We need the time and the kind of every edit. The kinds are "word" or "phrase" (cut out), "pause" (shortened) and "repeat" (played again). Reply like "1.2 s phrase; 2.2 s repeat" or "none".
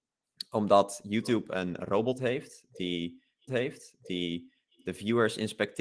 3.5 s repeat